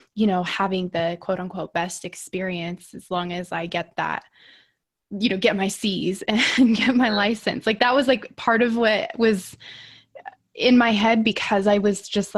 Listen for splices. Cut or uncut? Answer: uncut